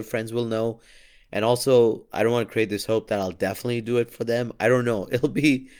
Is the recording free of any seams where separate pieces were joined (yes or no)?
yes